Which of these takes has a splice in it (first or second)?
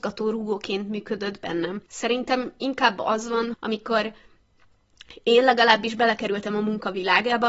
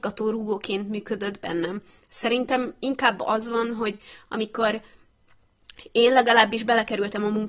first